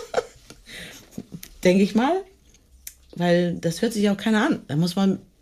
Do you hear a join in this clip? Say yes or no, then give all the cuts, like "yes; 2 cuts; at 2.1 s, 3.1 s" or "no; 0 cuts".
no; 0 cuts